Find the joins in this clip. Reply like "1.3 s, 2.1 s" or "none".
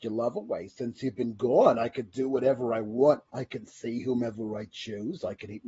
3.3 s